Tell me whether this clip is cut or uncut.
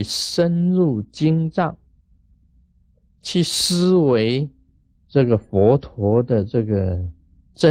uncut